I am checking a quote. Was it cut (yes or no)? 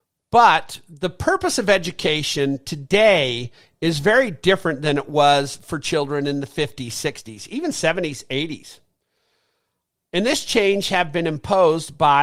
no